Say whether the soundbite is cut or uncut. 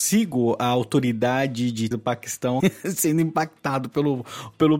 cut